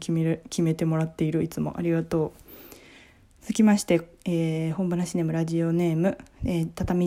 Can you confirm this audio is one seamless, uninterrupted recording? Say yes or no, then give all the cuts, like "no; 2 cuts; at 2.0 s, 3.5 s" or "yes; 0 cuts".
yes; 0 cuts